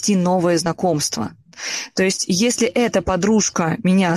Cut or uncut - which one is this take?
uncut